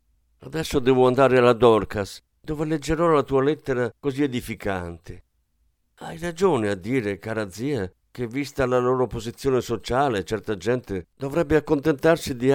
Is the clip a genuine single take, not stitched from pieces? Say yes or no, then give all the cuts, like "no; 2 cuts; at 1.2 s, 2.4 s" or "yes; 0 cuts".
yes; 0 cuts